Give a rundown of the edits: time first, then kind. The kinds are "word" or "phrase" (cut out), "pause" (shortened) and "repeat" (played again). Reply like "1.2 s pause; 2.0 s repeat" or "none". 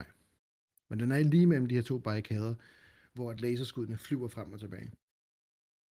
none